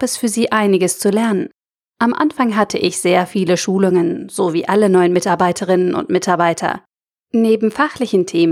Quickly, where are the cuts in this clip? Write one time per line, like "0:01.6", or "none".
none